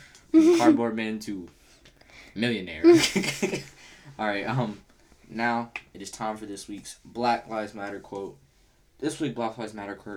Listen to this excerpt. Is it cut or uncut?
uncut